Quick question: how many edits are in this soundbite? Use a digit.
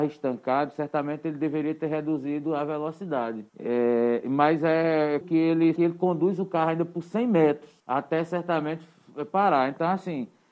4